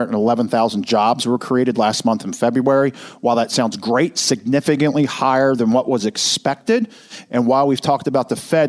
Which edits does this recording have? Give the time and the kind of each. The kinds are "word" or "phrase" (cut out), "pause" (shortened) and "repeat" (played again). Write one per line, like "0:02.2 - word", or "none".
none